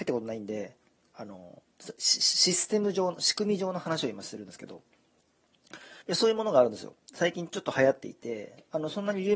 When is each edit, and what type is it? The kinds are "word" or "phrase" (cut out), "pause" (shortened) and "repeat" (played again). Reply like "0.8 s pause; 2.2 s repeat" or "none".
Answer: 6.0 s pause